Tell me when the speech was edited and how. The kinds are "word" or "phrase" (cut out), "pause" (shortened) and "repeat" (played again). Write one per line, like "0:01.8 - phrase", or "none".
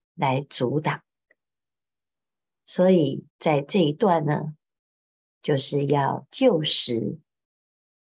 0:03.3 - pause